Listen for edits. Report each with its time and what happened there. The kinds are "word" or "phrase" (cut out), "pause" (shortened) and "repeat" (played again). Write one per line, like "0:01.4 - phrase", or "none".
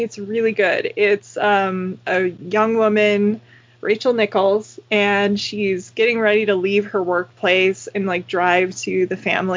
none